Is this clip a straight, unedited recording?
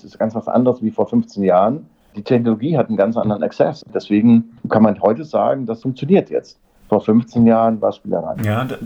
yes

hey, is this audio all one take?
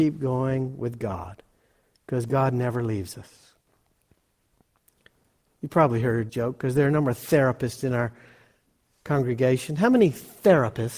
no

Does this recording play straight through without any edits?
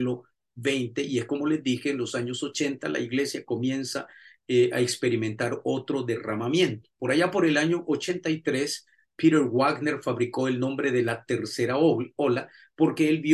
yes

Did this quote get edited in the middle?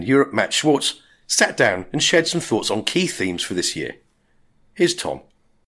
no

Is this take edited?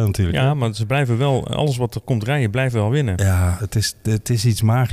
no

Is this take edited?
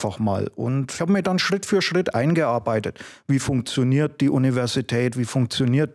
yes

